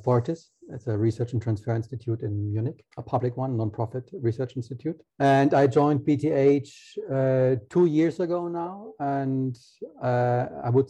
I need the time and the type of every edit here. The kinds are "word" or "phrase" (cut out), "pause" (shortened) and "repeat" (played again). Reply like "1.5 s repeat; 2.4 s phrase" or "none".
2.9 s pause; 5.1 s pause